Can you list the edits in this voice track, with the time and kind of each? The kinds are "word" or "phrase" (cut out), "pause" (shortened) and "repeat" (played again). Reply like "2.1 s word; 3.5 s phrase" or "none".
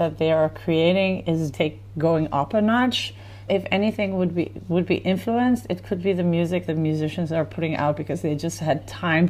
1.5 s word; 3.5 s word; 6.7 s word